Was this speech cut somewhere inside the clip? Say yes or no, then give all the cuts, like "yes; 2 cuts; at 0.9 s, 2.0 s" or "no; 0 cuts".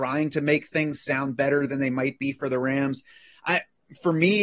no; 0 cuts